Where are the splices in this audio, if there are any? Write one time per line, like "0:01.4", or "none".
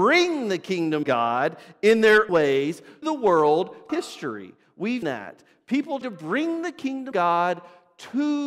0:01.0
0:02.3
0:03.0
0:03.9
0:05.0
0:06.0
0:07.1